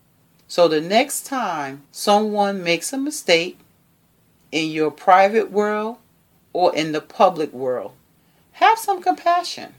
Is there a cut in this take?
yes; 1 cut; at 1.9 s

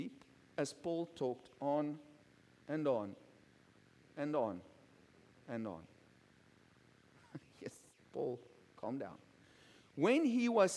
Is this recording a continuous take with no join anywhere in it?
yes; 0 cuts

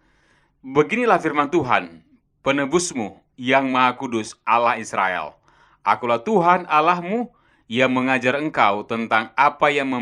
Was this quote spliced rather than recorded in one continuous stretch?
no; 0 cuts

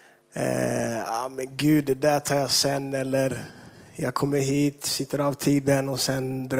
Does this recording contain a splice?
no; 0 cuts

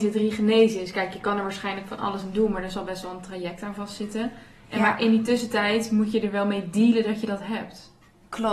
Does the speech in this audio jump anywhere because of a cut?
no; 0 cuts

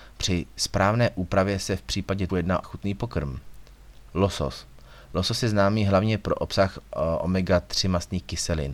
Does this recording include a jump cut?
yes; 2 cuts; at 2.3 s, 2.6 s

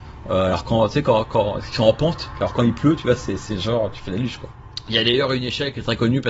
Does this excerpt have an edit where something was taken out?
no; 0 cuts

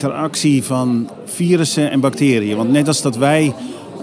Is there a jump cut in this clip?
no; 0 cuts

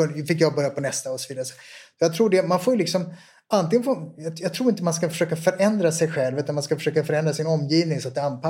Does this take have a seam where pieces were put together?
no; 0 cuts

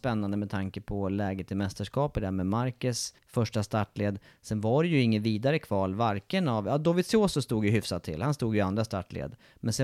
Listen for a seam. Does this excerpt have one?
yes; 1 cut; at 3.2 s

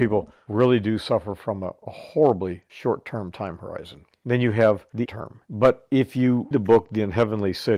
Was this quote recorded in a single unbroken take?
no; 2 cuts; at 5.1 s, 6.5 s

